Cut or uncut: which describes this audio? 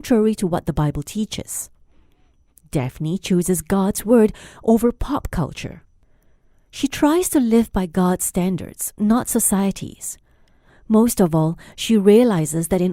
uncut